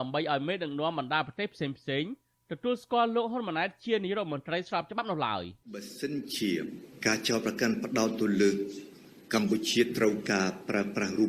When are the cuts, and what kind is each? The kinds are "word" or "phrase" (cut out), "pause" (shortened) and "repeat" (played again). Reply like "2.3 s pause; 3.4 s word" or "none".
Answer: 5.6 s pause